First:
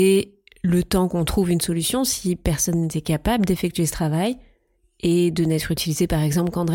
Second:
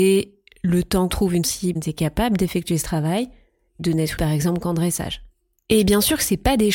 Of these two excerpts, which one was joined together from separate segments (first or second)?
second